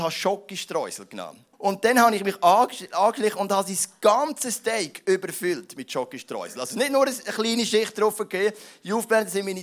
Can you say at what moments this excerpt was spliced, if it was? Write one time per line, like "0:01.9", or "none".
0:01.5